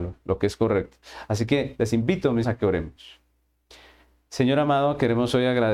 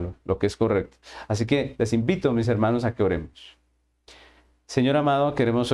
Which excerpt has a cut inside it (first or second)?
first